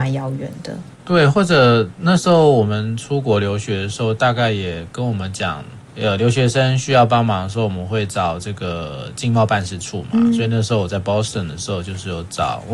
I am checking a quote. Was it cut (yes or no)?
no